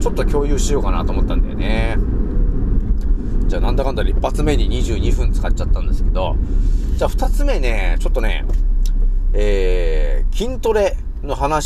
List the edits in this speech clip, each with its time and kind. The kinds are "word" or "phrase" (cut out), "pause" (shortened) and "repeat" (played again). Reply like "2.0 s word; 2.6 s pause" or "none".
none